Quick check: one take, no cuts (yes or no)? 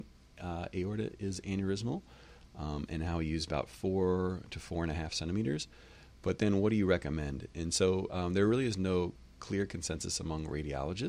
yes